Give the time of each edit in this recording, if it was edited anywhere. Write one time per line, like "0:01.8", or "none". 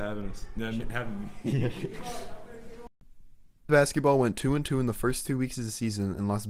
0:03.7

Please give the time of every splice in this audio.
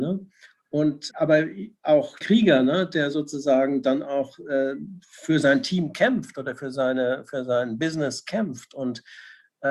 0:01.1
0:02.2

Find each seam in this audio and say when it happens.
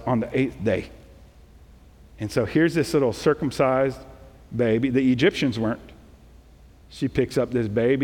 none

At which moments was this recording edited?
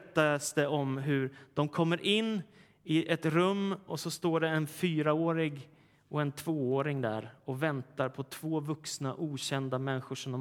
none

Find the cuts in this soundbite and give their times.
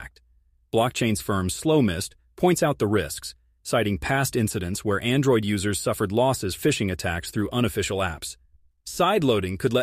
0:01.2
0:06.6

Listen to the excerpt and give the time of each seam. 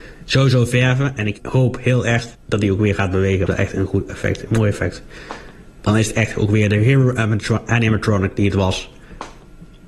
0:01.4
0:02.3
0:03.5

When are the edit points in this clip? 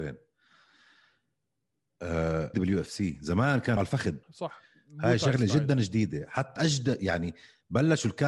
0:02.5
0:03.8
0:04.2
0:06.6

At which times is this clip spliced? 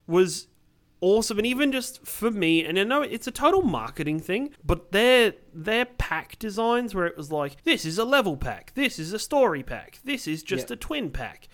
0:04.5
0:07.6

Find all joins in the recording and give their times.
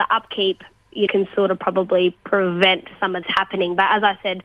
0:01.1
0:02.2
0:03.2

